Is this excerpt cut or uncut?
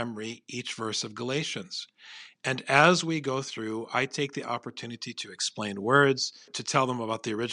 uncut